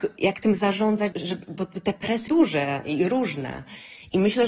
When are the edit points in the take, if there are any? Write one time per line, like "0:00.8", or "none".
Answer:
0:01.1
0:02.3